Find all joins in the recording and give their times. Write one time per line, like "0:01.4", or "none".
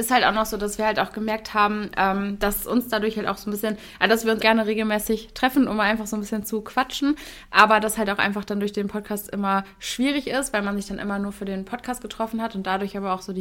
0:04.4